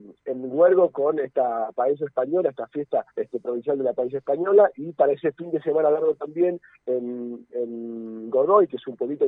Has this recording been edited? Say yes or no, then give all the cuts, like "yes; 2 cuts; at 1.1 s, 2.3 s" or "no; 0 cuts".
yes; 1 cut; at 3.1 s